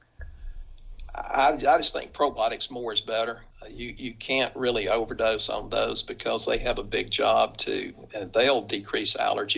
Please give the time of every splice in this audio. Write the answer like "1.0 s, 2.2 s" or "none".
3.5 s